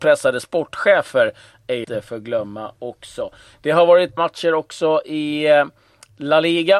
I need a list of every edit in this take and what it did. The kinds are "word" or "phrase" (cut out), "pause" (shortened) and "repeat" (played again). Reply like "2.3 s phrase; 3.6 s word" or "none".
1.8 s word; 4.2 s word